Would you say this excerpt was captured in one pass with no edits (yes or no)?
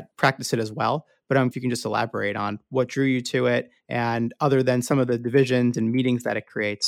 no